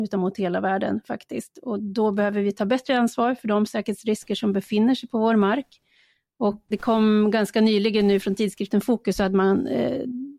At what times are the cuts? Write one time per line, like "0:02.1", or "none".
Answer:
0:06.7